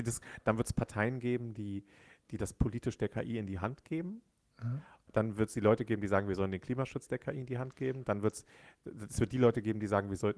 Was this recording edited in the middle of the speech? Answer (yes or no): no